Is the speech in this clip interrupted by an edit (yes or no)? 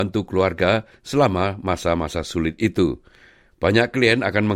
no